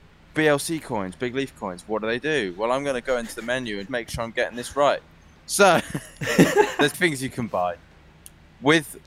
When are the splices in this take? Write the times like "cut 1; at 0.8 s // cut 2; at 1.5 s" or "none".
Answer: cut 1; at 3.9 s // cut 2; at 6.9 s

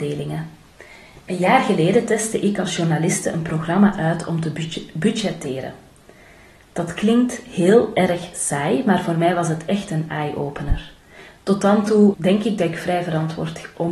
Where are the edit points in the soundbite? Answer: cut 1; at 12.1 s

